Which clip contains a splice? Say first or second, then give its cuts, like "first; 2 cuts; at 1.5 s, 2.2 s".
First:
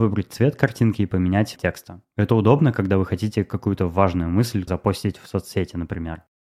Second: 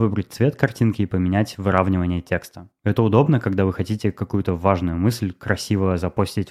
first; 2 cuts; at 1.6 s, 4.7 s